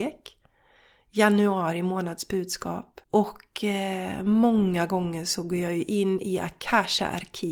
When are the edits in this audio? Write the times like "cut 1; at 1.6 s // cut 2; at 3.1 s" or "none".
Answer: cut 1; at 3.0 s